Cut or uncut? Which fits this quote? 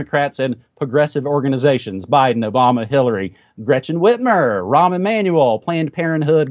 uncut